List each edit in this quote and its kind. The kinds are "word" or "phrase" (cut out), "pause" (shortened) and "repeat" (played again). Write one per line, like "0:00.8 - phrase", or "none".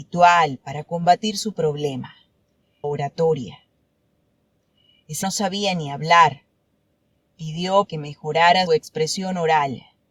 0:02.8 - word
0:05.2 - word
0:07.9 - word
0:08.7 - word